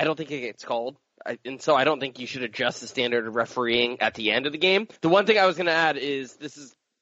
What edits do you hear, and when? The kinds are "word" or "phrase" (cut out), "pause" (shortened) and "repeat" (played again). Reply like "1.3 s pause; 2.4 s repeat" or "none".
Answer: 5.0 s pause